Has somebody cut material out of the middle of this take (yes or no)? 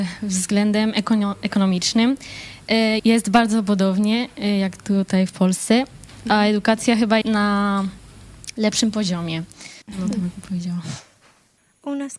yes